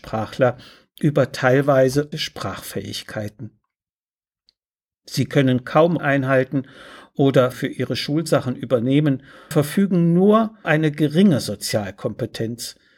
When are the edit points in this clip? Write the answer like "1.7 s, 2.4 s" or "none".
2.1 s, 6.0 s, 7.5 s, 9.5 s, 10.6 s